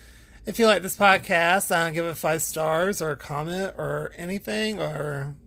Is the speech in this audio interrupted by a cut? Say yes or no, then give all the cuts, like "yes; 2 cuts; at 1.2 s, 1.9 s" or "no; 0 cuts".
no; 0 cuts